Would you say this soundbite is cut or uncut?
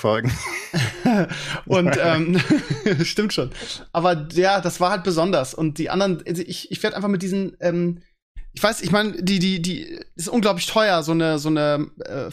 uncut